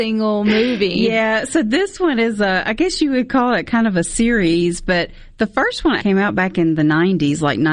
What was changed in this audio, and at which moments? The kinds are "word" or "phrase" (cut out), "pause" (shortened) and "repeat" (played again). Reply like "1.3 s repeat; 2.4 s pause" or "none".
6.0 s word